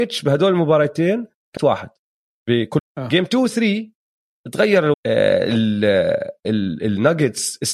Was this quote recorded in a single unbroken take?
no; 3 cuts; at 1.6 s, 2.8 s, 4.9 s

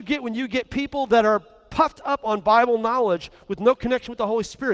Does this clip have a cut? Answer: no; 0 cuts

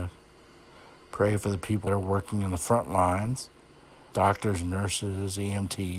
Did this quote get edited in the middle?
yes; 2 cuts; at 1.9 s, 4.1 s

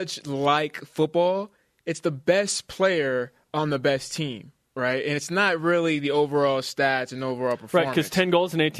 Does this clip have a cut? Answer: no; 0 cuts

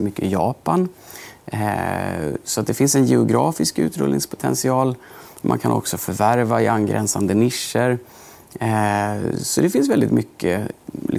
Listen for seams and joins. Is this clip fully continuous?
yes; 0 cuts

